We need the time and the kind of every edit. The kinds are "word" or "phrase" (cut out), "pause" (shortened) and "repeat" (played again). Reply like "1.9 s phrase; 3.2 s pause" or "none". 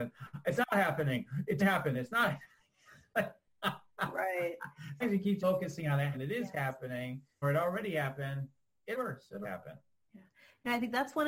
1.6 s word; 5.0 s word; 5.4 s word; 6.1 s word; 7.4 s word; 8.9 s word; 9.4 s word